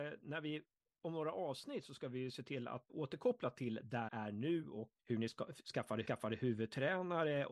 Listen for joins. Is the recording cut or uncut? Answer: cut